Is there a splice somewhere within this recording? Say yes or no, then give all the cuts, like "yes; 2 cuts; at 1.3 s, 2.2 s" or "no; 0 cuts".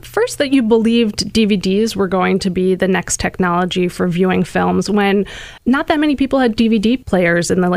yes; 1 cut; at 5.6 s